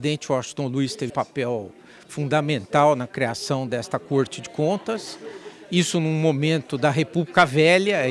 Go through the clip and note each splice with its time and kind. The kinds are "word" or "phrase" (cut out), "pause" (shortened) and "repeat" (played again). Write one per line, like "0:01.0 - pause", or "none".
0:01.1 - word